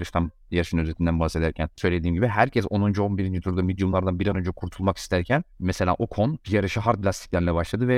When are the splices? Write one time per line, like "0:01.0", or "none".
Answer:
0:01.7
0:05.5
0:06.4